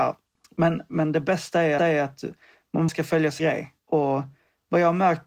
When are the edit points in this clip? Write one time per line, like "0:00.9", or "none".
0:01.8
0:02.9
0:03.4
0:03.8